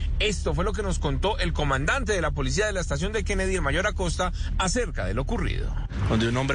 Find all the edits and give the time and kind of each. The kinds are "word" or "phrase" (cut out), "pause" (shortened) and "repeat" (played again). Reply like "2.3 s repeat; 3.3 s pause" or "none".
none